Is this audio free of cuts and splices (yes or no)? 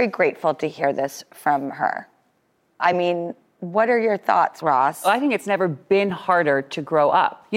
yes